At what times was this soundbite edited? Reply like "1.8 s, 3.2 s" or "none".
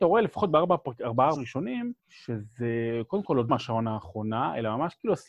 1.4 s, 2.0 s, 3.5 s

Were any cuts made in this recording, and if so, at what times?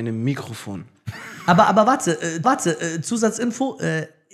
2.4 s

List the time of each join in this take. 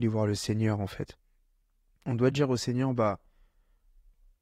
none

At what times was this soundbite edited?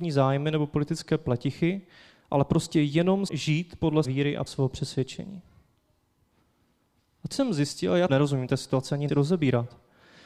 3.3 s, 4.0 s, 4.5 s, 7.3 s, 8.1 s, 9.1 s

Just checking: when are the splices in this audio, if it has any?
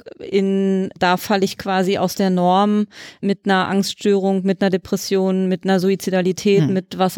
none

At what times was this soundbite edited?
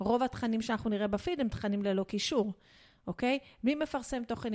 none

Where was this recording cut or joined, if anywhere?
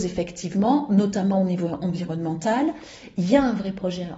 none

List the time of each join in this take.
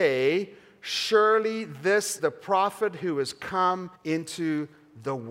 2.2 s, 3.9 s

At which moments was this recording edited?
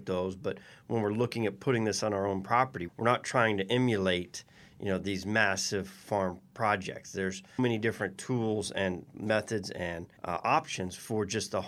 2.9 s, 7.6 s, 10.2 s

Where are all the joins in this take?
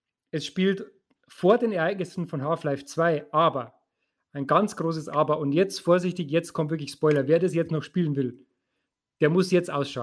none

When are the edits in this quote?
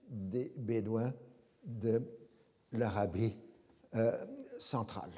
none

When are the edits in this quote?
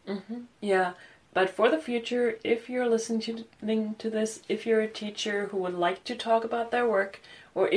none

